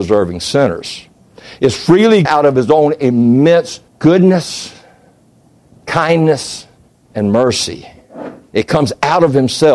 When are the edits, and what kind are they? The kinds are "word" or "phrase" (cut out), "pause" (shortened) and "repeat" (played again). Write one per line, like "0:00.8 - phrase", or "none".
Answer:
0:02.3 - word
0:03.9 - pause
0:06.8 - pause